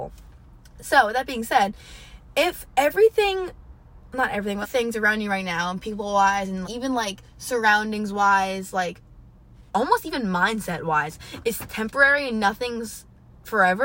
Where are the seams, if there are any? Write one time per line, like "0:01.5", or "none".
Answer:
0:04.6
0:06.6
0:09.7